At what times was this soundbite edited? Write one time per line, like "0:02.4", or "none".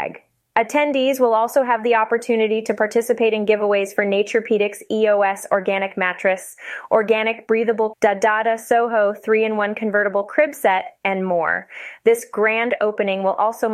0:07.9